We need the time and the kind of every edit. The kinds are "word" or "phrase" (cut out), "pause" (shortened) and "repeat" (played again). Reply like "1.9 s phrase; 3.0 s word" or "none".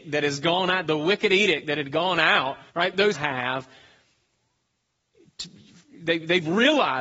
2.7 s pause; 3.1 s phrase